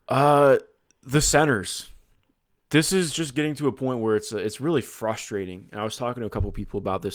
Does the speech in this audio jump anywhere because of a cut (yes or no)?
no